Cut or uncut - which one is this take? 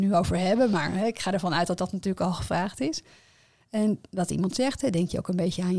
uncut